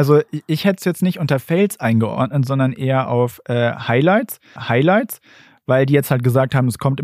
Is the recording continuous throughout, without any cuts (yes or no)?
no